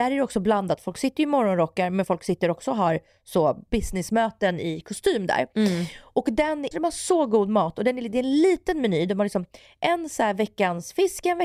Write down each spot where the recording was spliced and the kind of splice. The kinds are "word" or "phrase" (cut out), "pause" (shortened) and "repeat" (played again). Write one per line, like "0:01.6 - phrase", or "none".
0:06.7 - phrase